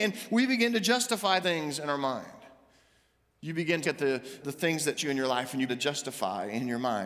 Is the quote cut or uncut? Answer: cut